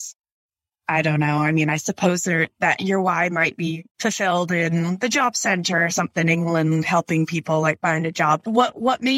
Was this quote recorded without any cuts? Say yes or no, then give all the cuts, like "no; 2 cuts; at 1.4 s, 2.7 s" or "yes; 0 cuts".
no; 1 cut; at 3.9 s